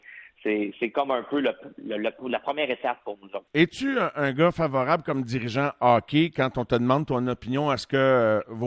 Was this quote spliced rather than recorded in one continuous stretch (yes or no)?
yes